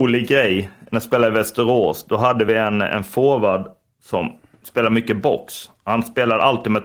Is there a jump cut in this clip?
no; 0 cuts

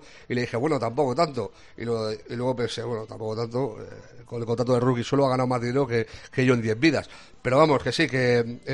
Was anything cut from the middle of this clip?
no; 0 cuts

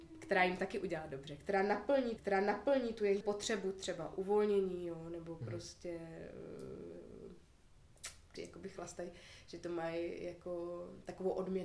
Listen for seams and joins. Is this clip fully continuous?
no; 3 cuts; at 2.2 s, 3.2 s, 8.4 s

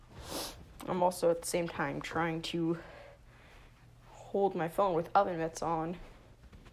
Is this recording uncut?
yes; 0 cuts

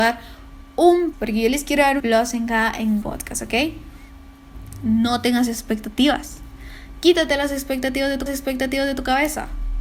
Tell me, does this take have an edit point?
yes; 4 cuts; at 1.1 s, 2.0 s, 3.0 s, 8.3 s

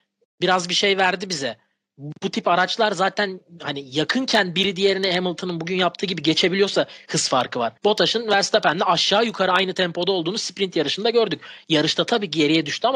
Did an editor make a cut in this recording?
yes; 1 cut; at 7.8 s

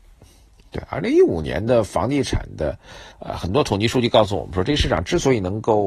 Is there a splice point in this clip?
yes; 1 cut; at 3.1 s

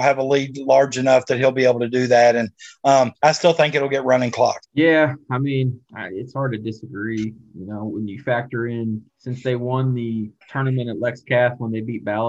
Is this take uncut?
no; 5 cuts; at 3.1 s, 4.6 s, 5.9 s, 9.1 s, 10.4 s

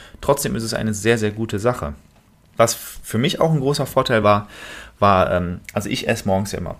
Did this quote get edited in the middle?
no; 0 cuts

